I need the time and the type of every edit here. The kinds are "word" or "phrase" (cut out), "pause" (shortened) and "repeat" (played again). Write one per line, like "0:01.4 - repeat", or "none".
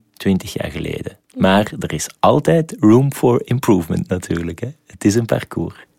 0:01.3 - pause